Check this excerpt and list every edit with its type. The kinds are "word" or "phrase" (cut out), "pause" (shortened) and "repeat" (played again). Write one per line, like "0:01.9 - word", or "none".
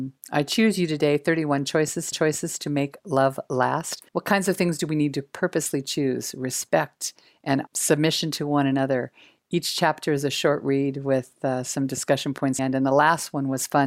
0:02.1 - repeat
0:04.1 - pause
0:07.7 - phrase
0:12.6 - phrase